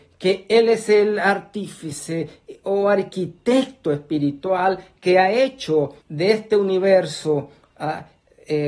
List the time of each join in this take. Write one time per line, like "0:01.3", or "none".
0:06.0